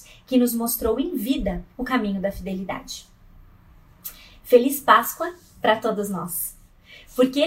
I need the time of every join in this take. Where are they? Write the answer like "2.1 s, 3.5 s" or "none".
none